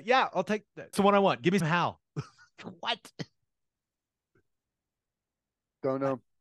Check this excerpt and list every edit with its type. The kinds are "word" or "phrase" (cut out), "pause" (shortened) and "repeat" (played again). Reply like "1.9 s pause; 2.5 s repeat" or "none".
0.9 s word; 1.6 s word